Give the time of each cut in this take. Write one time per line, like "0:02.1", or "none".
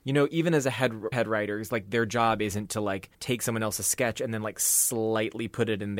0:01.1
0:03.1